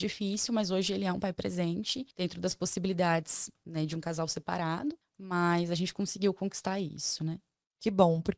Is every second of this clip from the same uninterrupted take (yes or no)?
no